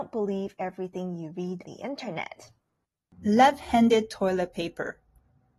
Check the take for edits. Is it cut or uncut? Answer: cut